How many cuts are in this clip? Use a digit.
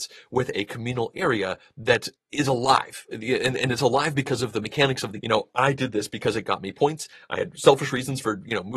2